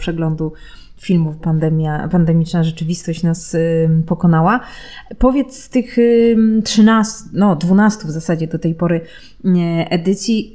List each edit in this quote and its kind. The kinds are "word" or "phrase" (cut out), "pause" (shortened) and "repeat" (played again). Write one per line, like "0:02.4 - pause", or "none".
0:01.4 - phrase